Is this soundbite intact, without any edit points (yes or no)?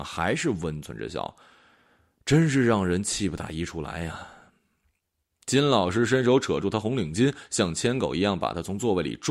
yes